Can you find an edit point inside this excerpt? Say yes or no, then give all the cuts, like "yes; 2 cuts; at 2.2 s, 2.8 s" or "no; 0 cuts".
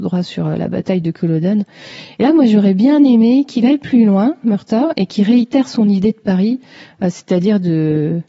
no; 0 cuts